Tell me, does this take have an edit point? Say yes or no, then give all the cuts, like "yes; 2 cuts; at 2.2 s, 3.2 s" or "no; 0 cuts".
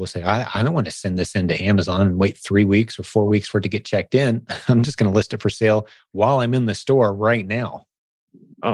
no; 0 cuts